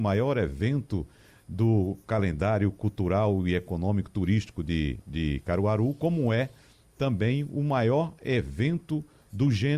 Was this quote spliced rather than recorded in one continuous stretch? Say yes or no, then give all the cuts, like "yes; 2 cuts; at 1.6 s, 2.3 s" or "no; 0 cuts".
no; 0 cuts